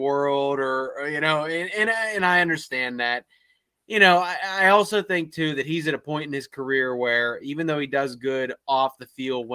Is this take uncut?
yes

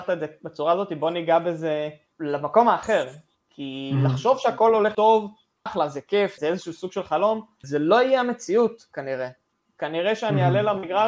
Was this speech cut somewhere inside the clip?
yes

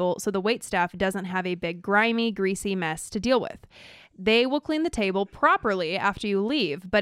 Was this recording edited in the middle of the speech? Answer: no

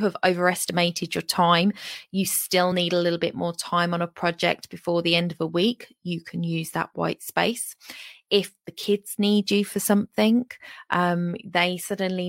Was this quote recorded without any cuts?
yes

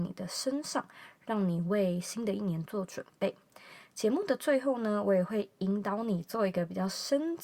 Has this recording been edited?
no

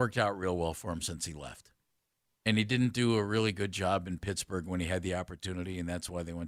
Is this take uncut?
yes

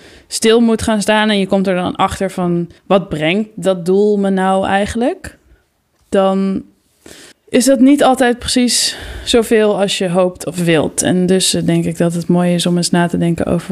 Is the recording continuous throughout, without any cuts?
no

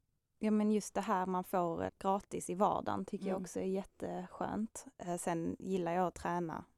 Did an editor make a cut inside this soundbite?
yes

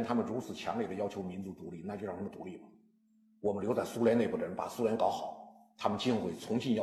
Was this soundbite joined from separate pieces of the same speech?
no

